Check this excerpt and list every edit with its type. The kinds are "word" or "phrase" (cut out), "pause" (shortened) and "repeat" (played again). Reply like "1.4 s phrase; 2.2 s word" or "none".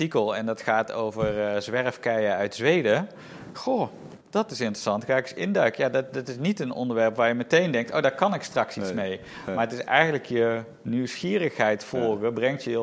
4.2 s pause